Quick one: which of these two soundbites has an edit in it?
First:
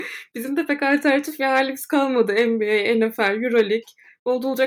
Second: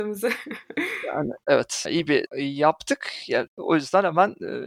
second; 3 cuts; at 1.8 s, 2.3 s, 3.5 s

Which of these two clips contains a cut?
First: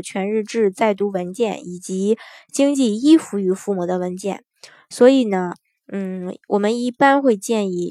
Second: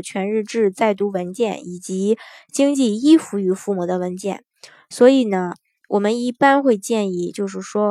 second; 1 cut; at 5.8 s

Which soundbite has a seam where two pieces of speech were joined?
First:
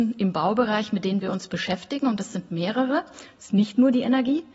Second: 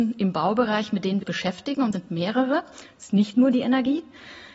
second; 2 cuts; at 1.2 s, 1.9 s

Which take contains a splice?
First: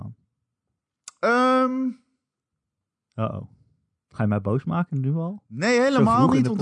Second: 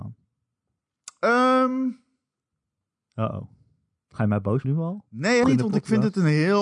second; 2 cuts; at 4.6 s, 5.4 s

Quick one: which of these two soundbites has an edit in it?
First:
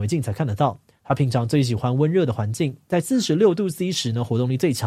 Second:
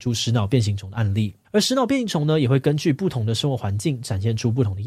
second; 1 cut; at 1.4 s

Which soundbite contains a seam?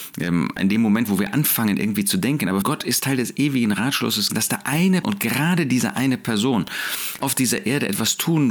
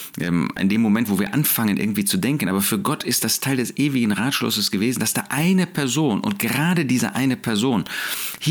first; 5 cuts; at 2.6 s, 3.0 s, 4.3 s, 5.0 s, 7.2 s

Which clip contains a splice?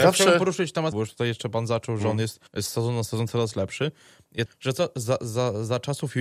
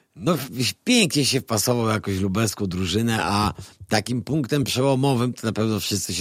first; 3 cuts; at 0.9 s, 2.5 s, 4.5 s

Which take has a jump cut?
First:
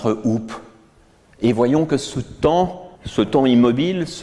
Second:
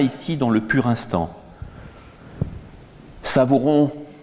first; 1 cut; at 3.0 s

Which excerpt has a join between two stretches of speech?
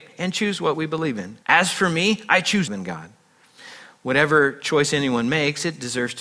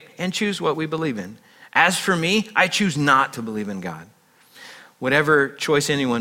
first; 2 cuts; at 1.4 s, 2.7 s

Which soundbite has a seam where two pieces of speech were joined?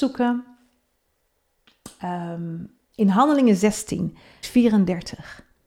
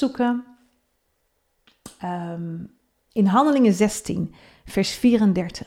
first; 2 cuts; at 2.8 s, 4.4 s

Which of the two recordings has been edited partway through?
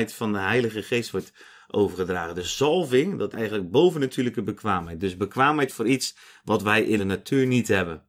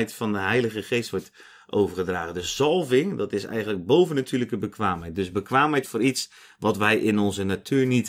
first; 2 cuts; at 3.3 s, 7.0 s

